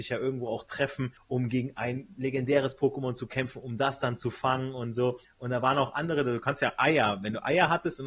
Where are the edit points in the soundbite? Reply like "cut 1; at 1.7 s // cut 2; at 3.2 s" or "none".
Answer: cut 1; at 5.2 s